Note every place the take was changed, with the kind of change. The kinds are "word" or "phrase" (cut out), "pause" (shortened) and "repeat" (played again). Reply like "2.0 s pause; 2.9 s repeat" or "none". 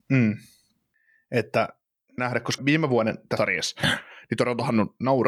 2.2 s word; 2.6 s word; 3.4 s word